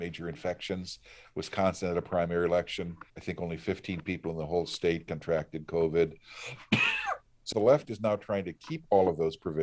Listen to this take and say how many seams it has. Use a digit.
2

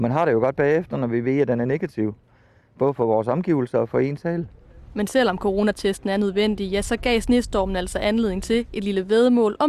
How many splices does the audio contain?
0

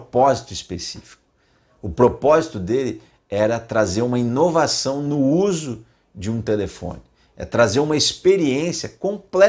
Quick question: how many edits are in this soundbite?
0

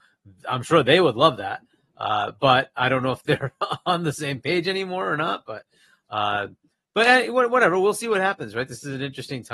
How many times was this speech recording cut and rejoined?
0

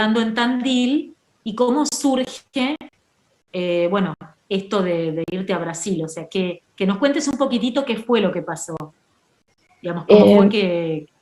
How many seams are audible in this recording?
0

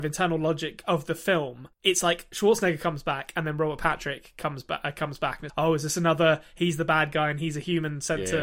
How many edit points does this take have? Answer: 1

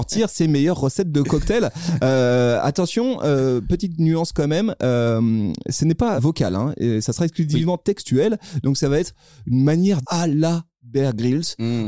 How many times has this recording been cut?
2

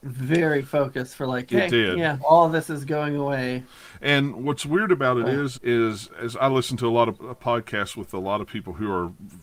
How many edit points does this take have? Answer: 3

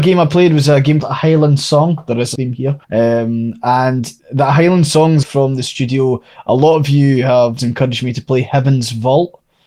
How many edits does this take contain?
6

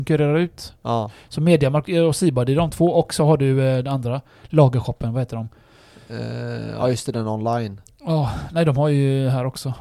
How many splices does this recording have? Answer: 0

